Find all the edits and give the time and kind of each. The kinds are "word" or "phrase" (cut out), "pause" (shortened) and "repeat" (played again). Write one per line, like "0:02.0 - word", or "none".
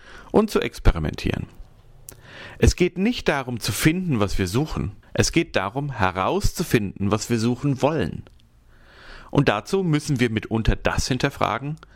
0:05.0 - pause